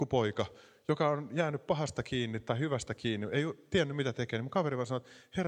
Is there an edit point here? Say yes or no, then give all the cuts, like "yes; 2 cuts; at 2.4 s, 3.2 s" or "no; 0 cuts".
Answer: no; 0 cuts